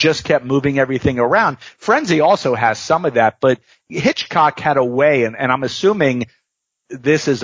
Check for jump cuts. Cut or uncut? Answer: uncut